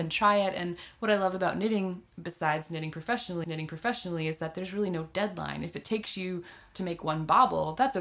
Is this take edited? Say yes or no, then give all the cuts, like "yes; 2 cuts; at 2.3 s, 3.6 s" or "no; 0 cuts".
yes; 2 cuts; at 3.4 s, 6.7 s